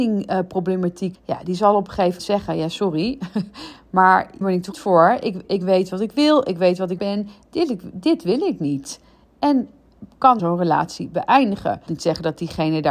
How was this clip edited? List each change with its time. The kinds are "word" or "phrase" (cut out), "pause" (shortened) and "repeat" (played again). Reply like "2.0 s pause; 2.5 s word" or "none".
1.1 s word; 2.2 s word; 4.4 s word; 4.7 s word; 5.4 s word; 7.0 s word; 10.4 s word; 11.9 s word